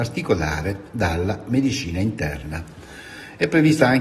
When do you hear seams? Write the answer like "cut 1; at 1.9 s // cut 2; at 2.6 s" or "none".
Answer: none